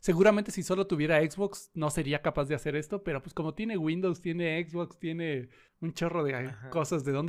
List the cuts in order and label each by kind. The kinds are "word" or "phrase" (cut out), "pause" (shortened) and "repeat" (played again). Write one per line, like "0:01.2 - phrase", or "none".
0:05.7 - pause

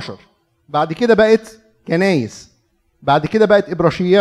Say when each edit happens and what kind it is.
none

